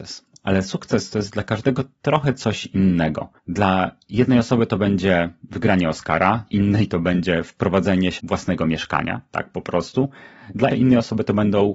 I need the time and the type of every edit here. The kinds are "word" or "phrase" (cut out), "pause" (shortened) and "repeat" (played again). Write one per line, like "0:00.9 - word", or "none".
0:03.4 - pause
0:06.5 - word
0:08.2 - word
0:10.7 - word